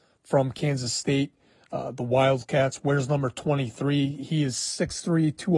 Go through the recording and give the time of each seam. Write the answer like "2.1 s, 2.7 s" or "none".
none